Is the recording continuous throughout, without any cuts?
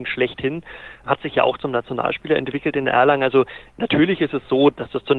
yes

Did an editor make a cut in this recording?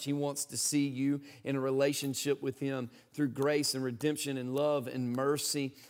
no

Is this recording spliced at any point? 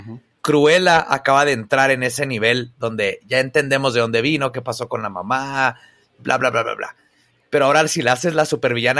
no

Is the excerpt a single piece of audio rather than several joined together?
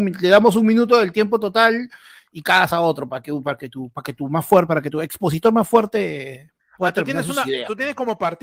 yes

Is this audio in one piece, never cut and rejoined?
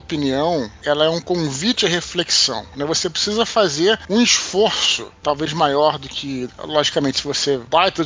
no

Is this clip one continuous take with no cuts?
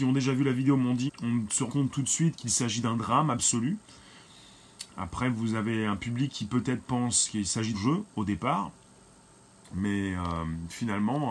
no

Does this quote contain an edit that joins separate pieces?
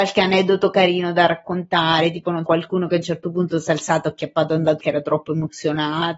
yes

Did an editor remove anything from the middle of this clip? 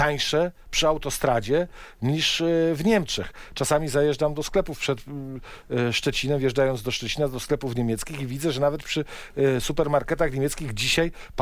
no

